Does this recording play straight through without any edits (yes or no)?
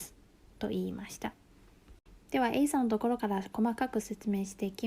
no